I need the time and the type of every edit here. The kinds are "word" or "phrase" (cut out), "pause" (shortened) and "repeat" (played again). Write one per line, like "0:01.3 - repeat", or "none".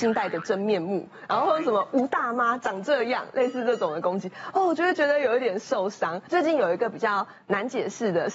none